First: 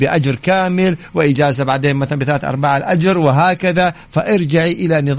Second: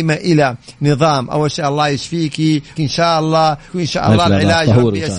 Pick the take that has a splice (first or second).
second